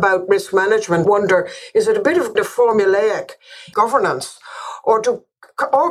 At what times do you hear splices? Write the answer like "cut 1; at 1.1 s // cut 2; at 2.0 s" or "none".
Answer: cut 1; at 1.0 s // cut 2; at 2.4 s // cut 3; at 3.7 s